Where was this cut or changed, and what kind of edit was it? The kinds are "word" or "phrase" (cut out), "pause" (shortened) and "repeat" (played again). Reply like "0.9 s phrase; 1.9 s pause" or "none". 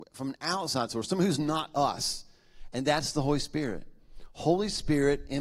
none